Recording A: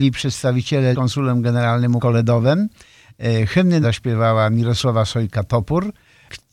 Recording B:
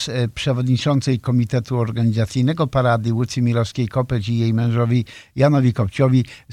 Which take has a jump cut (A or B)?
A